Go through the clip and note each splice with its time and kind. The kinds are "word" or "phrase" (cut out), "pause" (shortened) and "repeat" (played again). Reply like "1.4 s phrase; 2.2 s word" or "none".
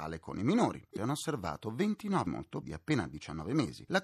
1.0 s word; 2.3 s word; 2.6 s word